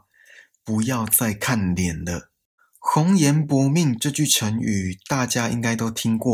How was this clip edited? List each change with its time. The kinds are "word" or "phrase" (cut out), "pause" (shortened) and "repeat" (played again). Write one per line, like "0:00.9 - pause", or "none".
0:02.6 - pause